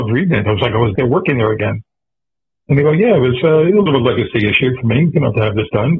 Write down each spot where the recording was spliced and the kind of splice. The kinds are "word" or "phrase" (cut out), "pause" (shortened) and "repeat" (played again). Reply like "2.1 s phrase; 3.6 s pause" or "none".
1.0 s word; 3.9 s phrase